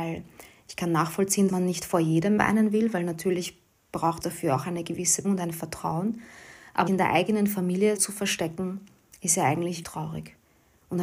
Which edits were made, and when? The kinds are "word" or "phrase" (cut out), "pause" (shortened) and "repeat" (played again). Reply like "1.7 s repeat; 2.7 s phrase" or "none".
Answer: 1.5 s word; 2.4 s word; 4.2 s word; 5.2 s word; 6.9 s word; 8.0 s word; 9.8 s word